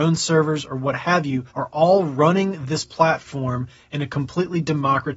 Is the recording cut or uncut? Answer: cut